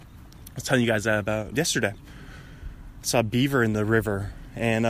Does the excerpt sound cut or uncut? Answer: cut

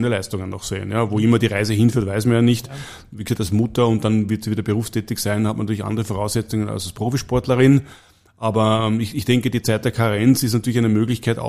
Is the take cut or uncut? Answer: uncut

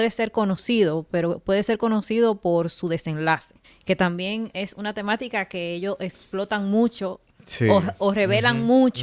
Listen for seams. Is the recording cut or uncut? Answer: cut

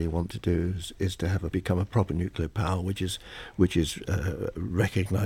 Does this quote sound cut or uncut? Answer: cut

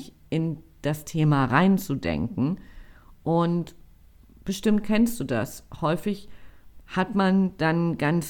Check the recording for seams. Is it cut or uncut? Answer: uncut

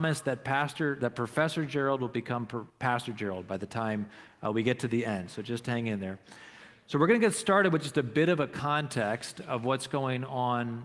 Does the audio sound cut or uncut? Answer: cut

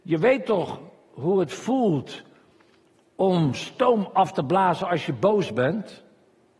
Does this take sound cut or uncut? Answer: uncut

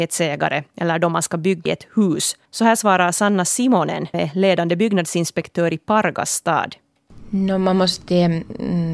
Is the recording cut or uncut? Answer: cut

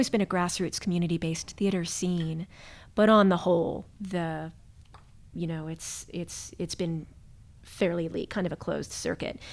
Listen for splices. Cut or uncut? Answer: uncut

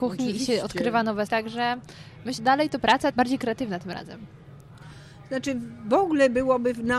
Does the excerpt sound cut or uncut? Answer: cut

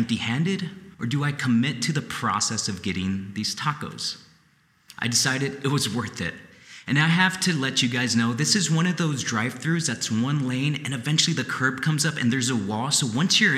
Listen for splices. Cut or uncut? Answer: cut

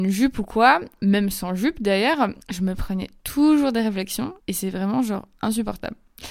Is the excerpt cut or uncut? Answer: cut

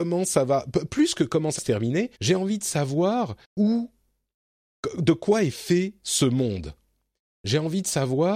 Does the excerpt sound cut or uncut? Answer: cut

